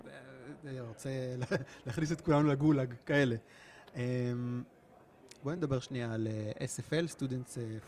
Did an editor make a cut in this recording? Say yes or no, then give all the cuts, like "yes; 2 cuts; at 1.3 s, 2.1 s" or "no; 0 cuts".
no; 0 cuts